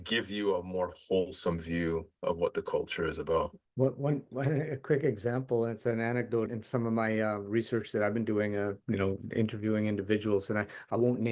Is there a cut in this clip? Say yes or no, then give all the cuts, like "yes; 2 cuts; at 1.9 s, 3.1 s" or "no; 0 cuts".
yes; 2 cuts; at 3.7 s, 6.5 s